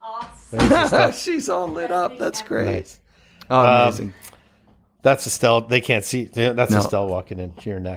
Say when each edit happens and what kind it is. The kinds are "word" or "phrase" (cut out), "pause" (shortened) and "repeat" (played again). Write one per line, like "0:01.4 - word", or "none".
none